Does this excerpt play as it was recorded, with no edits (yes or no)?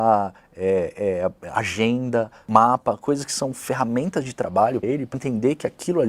no